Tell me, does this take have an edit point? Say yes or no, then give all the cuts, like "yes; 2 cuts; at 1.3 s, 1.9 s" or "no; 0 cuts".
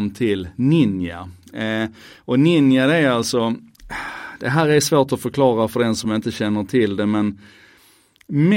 no; 0 cuts